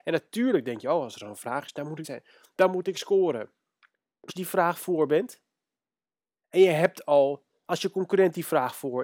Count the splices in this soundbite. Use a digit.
2